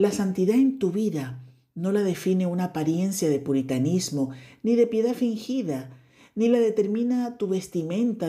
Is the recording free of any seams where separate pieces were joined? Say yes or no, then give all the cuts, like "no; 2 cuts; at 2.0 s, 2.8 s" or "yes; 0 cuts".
yes; 0 cuts